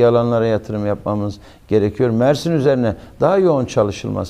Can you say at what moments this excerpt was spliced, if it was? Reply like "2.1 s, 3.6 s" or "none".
none